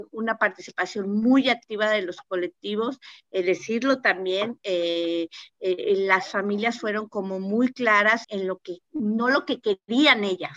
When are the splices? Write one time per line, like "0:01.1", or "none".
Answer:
0:08.2
0:08.8